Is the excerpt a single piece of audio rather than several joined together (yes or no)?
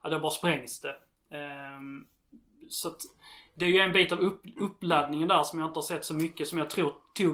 yes